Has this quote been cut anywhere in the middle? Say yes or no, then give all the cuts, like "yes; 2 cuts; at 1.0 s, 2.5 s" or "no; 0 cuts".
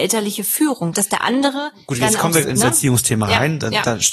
yes; 2 cuts; at 0.9 s, 2.4 s